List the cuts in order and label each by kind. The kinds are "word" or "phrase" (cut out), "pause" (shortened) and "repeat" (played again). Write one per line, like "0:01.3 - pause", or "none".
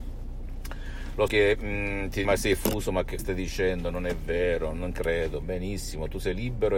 0:01.3 - word
0:02.2 - word
0:03.2 - word
0:04.9 - word